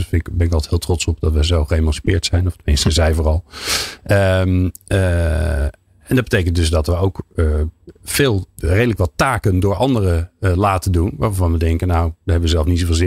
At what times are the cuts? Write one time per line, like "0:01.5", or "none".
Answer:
none